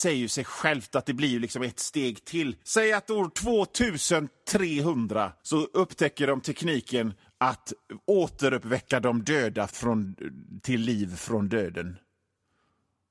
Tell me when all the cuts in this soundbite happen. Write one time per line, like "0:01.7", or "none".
0:02.6
0:05.4
0:07.2
0:09.7